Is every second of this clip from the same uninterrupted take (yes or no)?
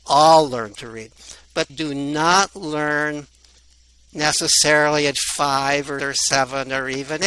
no